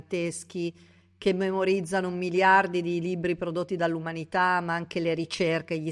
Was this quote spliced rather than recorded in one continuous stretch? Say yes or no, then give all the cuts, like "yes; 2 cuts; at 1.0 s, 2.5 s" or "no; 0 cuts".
no; 0 cuts